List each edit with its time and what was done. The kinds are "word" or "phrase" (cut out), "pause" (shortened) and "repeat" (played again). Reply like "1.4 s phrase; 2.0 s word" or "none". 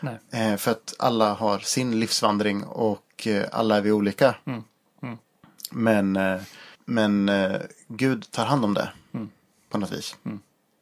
6.7 s pause